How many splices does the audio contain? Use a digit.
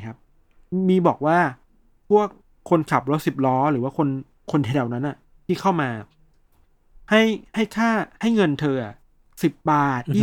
0